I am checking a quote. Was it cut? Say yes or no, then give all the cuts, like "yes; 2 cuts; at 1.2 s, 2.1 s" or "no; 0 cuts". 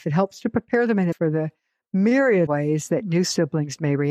yes; 2 cuts; at 1.1 s, 2.5 s